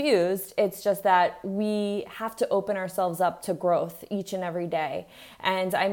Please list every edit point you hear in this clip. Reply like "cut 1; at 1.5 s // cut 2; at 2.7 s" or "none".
none